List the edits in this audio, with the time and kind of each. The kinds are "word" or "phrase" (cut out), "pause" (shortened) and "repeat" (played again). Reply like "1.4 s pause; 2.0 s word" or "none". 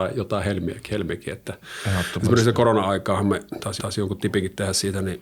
3.8 s repeat